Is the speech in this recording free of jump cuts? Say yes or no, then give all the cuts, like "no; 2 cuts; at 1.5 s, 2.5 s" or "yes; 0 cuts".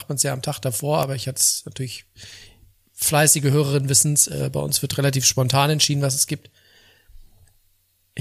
yes; 0 cuts